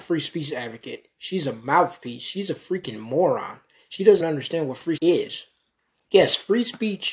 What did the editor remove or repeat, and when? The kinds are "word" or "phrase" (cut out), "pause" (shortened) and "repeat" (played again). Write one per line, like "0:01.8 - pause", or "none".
0:04.2 - word
0:05.0 - word